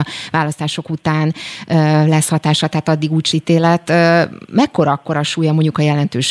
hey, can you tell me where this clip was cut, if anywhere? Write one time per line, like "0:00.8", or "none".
0:03.3